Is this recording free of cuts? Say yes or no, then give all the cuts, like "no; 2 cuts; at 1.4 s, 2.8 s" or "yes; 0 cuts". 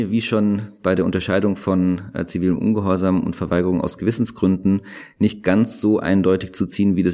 yes; 0 cuts